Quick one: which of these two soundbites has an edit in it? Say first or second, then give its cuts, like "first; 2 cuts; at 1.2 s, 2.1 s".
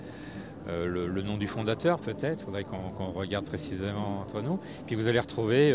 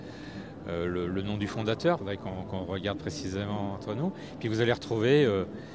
second; 1 cut; at 2.0 s